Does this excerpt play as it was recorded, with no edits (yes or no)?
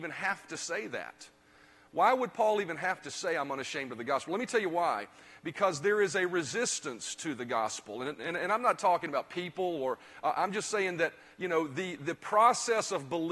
yes